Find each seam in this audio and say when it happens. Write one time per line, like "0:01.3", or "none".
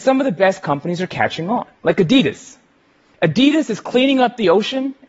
0:01.7